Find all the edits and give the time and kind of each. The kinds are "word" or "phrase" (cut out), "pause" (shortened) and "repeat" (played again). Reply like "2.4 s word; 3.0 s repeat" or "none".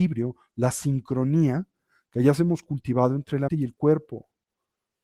3.5 s word